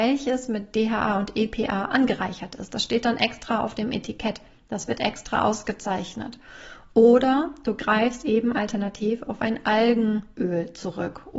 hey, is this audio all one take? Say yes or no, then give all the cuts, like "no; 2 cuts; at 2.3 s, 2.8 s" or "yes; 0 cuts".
yes; 0 cuts